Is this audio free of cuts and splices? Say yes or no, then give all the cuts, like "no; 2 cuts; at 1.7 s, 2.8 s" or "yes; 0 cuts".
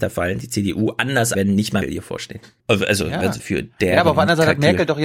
no; 4 cuts; at 1.3 s, 1.8 s, 2.6 s, 3.4 s